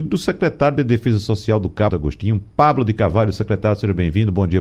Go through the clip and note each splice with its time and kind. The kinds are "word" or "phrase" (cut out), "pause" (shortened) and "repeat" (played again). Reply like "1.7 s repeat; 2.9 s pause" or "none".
1.9 s phrase